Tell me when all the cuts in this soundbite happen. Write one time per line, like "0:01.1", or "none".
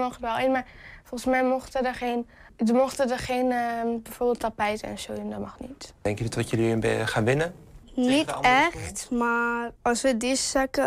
0:02.5
0:07.8
0:09.8